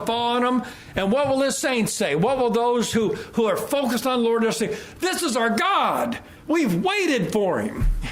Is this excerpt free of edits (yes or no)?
yes